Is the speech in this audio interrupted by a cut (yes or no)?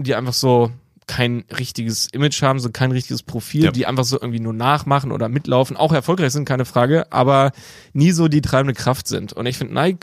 no